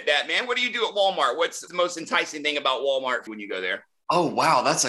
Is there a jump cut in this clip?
yes; 2 cuts; at 1.7 s, 3.3 s

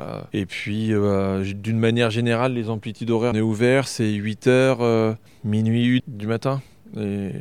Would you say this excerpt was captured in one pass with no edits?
no; 2 cuts; at 3.3 s, 6.0 s

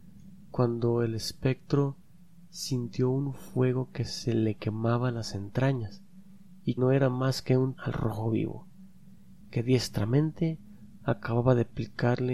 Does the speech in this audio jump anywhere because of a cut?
yes; 2 cuts; at 6.8 s, 7.8 s

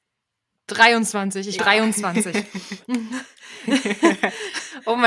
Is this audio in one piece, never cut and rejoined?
no; 1 cut; at 1.6 s

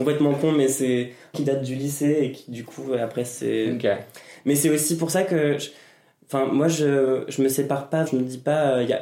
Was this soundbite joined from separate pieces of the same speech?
yes; 2 cuts; at 1.3 s, 8.1 s

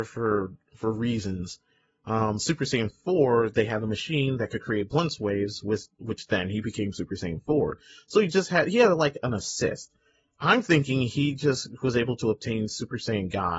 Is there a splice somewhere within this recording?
no; 0 cuts

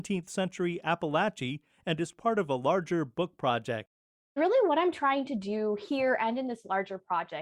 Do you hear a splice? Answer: no; 0 cuts

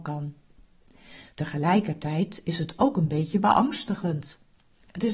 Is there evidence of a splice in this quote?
no; 0 cuts

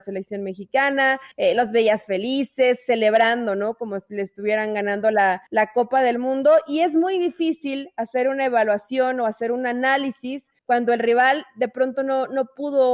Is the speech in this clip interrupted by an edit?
yes; 3 cuts; at 1.3 s, 5.5 s, 10.6 s

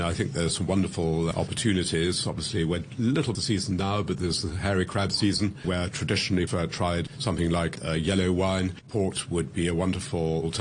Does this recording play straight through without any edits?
no; 3 cuts; at 1.3 s, 3.3 s, 6.5 s

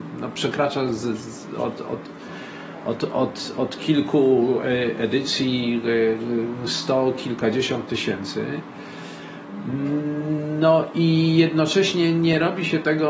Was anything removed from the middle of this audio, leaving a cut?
no; 0 cuts

